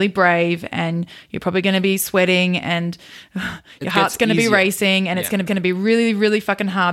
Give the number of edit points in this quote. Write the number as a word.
one